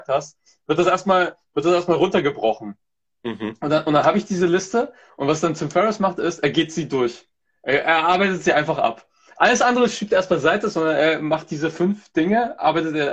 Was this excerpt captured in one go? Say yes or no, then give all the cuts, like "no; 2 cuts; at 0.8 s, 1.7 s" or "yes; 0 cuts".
yes; 0 cuts